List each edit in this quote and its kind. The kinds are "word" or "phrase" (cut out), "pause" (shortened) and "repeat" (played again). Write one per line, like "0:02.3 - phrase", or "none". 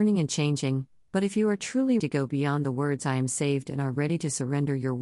0:02.0 - word